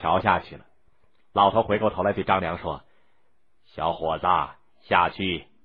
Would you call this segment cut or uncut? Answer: uncut